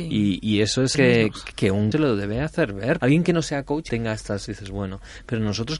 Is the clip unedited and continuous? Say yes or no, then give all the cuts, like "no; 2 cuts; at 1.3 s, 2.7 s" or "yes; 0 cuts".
no; 6 cuts; at 0.9 s, 1.5 s, 1.9 s, 3.0 s, 3.9 s, 4.5 s